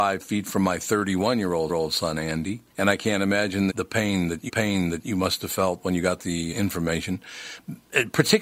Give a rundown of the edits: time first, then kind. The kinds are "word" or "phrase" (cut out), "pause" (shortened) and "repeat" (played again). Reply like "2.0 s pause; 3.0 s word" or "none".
1.7 s repeat; 2.7 s pause; 3.7 s word; 4.5 s repeat; 6.5 s word